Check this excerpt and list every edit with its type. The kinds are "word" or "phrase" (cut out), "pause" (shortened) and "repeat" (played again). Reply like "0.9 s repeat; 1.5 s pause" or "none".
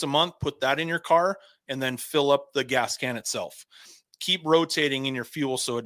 none